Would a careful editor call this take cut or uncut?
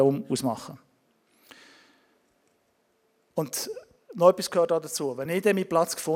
uncut